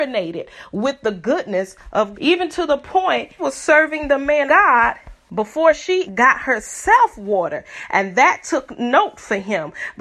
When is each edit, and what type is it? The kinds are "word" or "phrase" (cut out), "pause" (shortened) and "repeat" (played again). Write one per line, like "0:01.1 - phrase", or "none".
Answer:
0:02.1 - word
0:03.4 - word
0:04.5 - word
0:06.1 - word